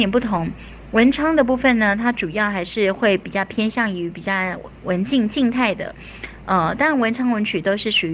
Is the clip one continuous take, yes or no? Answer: yes